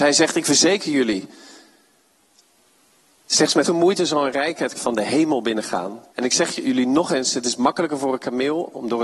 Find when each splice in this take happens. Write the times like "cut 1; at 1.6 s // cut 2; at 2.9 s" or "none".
cut 1; at 3.6 s // cut 2; at 4.7 s // cut 3; at 6.1 s